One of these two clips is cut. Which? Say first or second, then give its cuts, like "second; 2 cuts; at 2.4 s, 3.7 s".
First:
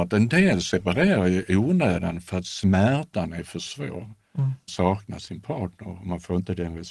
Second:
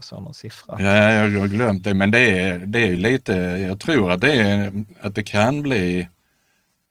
first; 1 cut; at 4.7 s